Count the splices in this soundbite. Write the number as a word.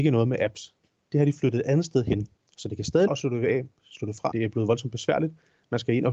three